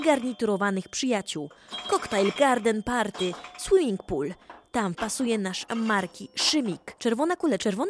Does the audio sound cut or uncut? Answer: cut